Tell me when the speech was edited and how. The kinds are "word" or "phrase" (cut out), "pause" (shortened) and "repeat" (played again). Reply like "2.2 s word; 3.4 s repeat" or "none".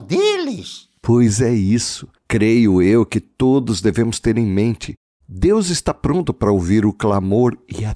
none